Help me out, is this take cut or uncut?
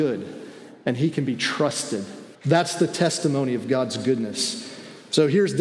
cut